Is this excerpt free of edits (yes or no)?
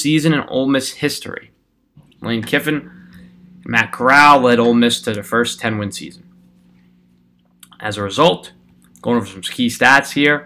yes